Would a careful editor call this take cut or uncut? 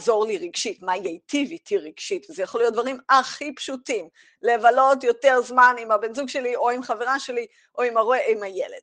uncut